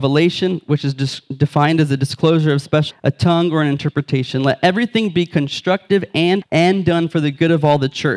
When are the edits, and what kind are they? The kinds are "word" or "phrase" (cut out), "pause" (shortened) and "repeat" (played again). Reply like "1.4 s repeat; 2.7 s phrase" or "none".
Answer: 2.9 s word; 6.4 s word